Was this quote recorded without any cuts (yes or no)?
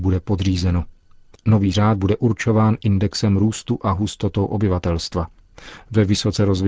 no